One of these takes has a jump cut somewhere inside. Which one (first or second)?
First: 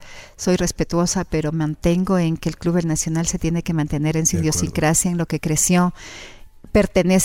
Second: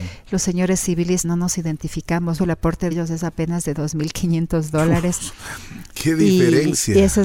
second